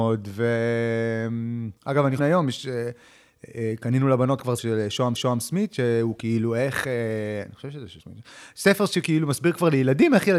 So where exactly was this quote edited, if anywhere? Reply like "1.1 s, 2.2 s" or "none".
1.8 s, 2.2 s, 4.6 s, 5.1 s, 8.0 s